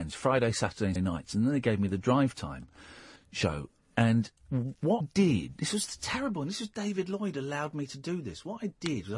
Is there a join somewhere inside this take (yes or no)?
yes